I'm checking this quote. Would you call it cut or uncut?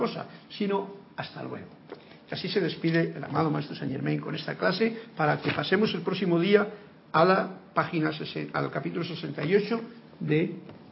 uncut